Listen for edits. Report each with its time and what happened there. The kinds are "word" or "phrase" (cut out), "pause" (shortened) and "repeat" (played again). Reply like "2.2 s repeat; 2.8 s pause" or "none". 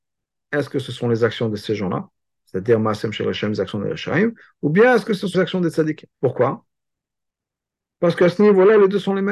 5.3 s word; 6.1 s pause